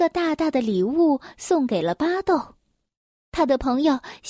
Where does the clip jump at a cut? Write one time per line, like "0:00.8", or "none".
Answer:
none